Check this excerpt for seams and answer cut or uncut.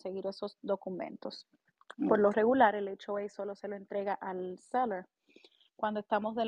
uncut